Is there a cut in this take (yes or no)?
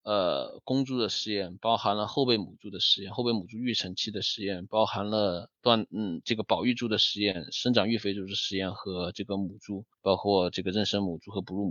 yes